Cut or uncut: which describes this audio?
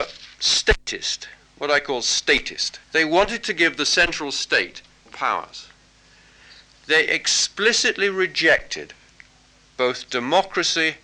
cut